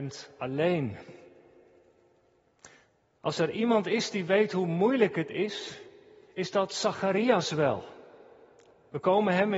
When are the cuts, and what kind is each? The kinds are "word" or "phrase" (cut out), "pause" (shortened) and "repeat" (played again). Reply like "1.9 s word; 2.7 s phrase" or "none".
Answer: none